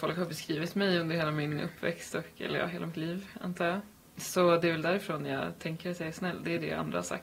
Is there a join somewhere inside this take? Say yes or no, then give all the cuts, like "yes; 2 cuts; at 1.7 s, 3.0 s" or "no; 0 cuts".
no; 0 cuts